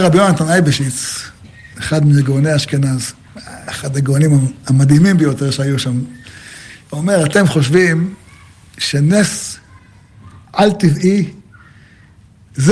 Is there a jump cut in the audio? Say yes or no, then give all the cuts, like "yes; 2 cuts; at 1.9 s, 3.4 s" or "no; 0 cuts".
yes; 1 cut; at 6.8 s